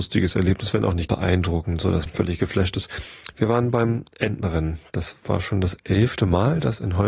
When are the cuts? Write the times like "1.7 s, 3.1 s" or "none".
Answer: 1.1 s, 2.1 s